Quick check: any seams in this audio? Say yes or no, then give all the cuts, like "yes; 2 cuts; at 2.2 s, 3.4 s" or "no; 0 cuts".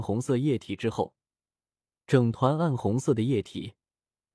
no; 0 cuts